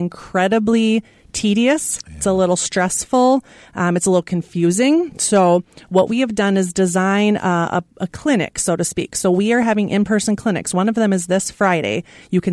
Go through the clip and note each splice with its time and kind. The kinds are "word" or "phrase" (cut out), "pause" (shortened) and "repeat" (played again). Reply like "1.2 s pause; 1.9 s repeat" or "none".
none